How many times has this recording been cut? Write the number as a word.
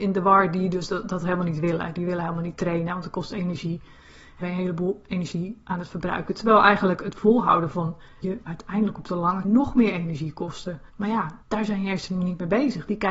five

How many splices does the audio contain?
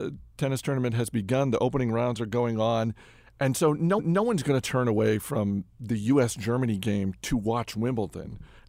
one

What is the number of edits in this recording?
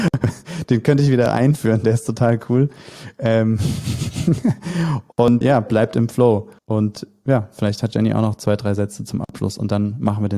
two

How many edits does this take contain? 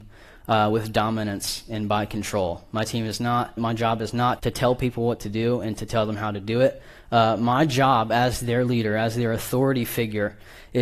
two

